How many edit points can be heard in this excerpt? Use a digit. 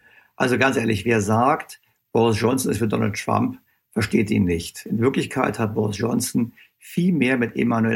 0